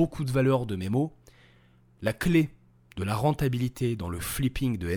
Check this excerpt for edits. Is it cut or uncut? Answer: uncut